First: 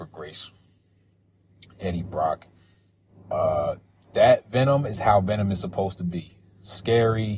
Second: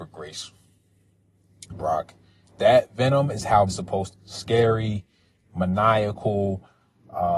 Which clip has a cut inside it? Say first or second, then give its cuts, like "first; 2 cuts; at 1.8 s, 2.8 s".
second; 4 cuts; at 1.7 s, 2.4 s, 3.7 s, 4.1 s